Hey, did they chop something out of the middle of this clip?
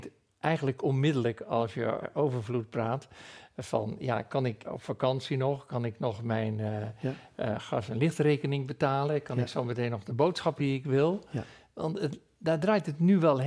yes; 3 cuts; at 2.0 s, 4.6 s, 10.6 s

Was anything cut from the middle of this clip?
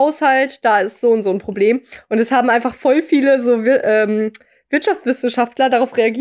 no; 0 cuts

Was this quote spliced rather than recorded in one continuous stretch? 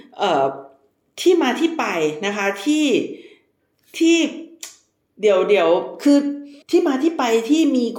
yes; 1 cut; at 6.6 s

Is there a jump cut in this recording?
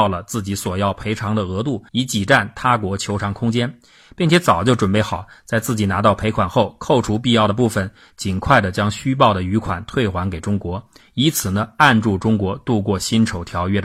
yes; 1 cut; at 1.9 s

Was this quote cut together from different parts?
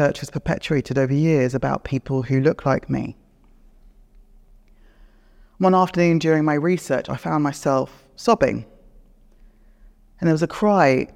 no; 0 cuts

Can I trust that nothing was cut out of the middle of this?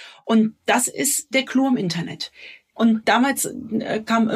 no; 1 cut; at 1.3 s

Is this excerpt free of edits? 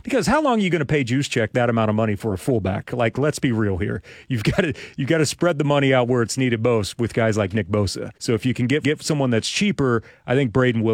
no; 2 cuts; at 8.2 s, 8.8 s

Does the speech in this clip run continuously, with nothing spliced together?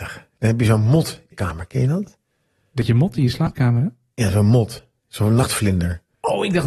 no; 1 cut; at 1.3 s

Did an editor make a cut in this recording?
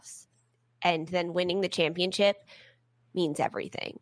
no; 0 cuts

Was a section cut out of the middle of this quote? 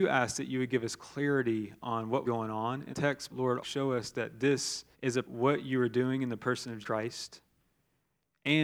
yes; 7 cuts; at 2.2 s, 2.9 s, 3.3 s, 3.6 s, 4.9 s, 5.2 s, 6.8 s

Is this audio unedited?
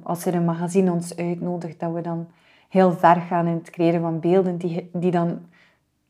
yes; 0 cuts

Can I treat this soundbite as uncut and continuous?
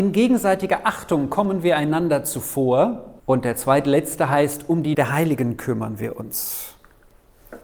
no; 2 cuts; at 3.2 s, 4.9 s

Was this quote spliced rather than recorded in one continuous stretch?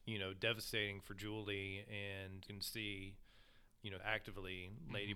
yes; 3 cuts; at 2.5 s, 3.7 s, 4.0 s

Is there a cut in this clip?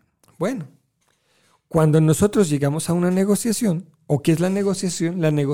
no; 0 cuts

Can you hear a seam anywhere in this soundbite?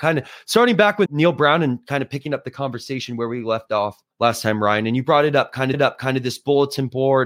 yes; 3 cuts; at 1.1 s, 4.1 s, 5.7 s

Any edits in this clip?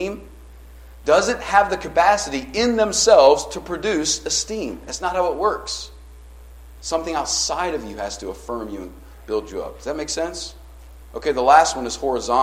no; 0 cuts

